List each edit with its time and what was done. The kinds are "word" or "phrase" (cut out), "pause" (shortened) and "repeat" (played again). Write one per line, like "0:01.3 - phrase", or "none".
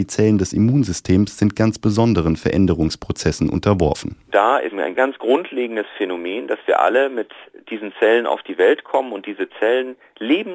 0:04.7 - word

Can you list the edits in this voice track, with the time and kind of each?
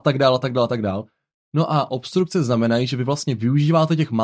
none

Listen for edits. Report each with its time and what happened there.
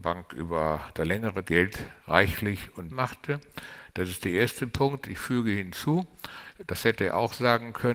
0:01.4 - word
0:02.0 - pause
0:02.9 - word

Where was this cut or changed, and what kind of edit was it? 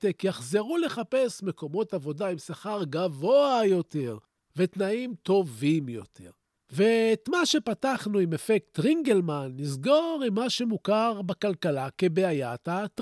none

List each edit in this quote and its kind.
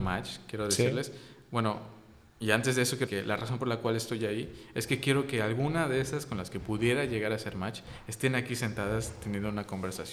0:03.1 - word

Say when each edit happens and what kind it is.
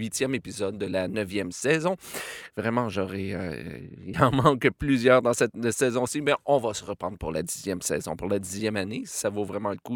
0:04.1 - word

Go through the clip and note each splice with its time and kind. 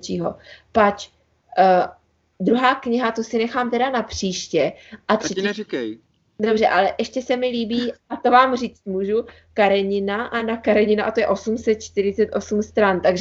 none

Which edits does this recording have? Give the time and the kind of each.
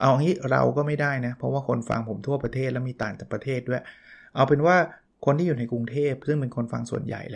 none

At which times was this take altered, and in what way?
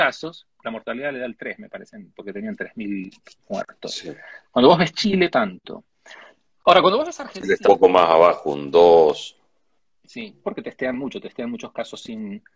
0:05.3 - phrase
0:07.6 - word
0:10.4 - phrase

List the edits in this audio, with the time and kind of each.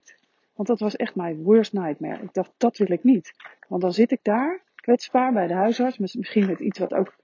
0:04.7 - pause

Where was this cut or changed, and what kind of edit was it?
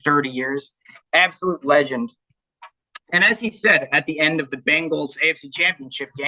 none

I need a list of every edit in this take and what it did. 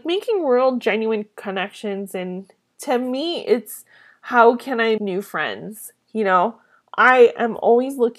0:05.0 - word

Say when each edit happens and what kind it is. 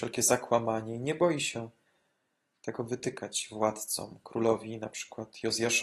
none

